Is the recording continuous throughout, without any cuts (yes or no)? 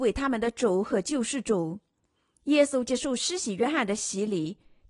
yes